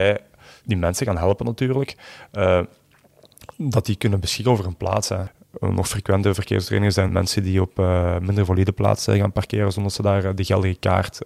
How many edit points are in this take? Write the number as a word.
one